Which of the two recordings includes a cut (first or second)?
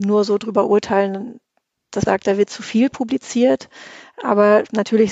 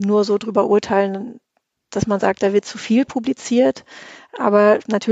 first